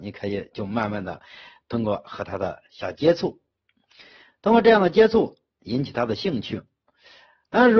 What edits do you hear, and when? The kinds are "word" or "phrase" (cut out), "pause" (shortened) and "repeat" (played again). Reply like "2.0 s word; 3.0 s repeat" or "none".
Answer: none